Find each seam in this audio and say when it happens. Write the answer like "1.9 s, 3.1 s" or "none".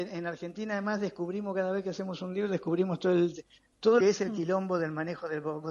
4.0 s